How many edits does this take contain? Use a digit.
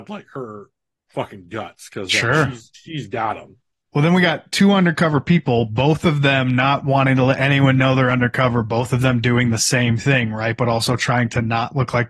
0